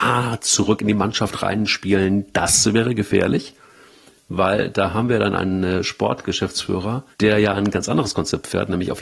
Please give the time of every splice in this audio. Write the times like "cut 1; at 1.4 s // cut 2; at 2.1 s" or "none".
cut 1; at 7.1 s